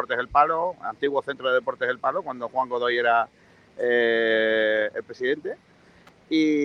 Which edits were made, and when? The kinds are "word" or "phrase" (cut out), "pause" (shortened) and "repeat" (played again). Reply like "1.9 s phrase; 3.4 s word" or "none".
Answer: none